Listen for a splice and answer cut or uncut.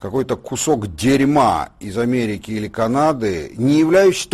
uncut